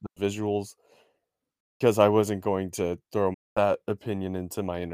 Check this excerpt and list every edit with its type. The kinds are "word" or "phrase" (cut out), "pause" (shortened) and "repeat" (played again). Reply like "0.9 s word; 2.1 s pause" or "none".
3.3 s word